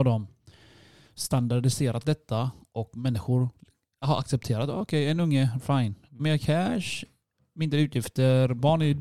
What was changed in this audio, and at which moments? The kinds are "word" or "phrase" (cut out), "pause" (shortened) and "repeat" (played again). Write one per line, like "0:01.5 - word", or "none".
0:06.2 - word